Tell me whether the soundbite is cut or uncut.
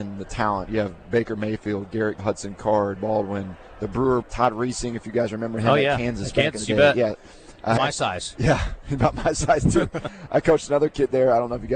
cut